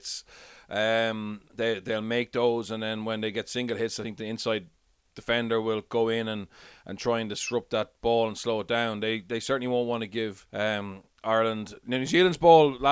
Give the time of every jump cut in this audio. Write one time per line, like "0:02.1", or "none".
0:10.5